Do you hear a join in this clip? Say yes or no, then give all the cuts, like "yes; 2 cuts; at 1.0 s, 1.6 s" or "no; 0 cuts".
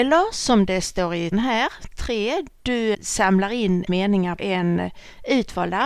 yes; 5 cuts; at 1.3 s, 1.9 s, 2.9 s, 3.9 s, 4.4 s